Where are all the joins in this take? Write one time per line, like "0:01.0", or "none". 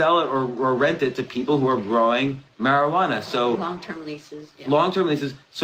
none